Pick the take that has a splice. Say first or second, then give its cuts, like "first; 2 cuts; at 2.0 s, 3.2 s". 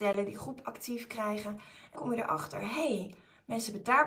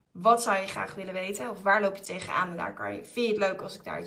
first; 1 cut; at 2.0 s